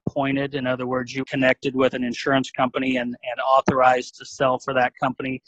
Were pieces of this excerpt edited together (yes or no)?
yes